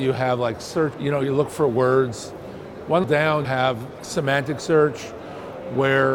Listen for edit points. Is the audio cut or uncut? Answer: cut